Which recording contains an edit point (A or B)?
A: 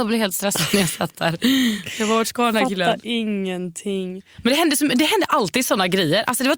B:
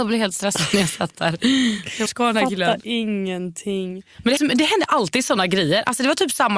B